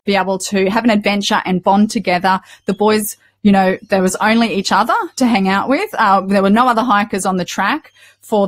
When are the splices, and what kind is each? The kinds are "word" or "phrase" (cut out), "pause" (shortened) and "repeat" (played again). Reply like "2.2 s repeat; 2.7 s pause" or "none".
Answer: none

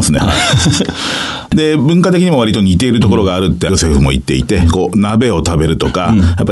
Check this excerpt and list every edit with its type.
none

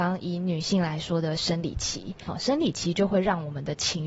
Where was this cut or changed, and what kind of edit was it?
2.3 s word

